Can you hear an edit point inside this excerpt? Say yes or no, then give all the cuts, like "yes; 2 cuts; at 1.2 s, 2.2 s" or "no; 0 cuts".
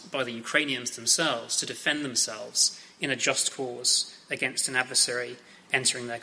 no; 0 cuts